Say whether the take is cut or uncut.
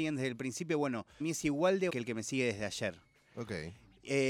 cut